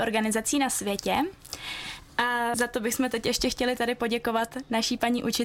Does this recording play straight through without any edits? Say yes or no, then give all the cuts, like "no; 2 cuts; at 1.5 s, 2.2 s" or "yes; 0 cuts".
no; 1 cut; at 2.5 s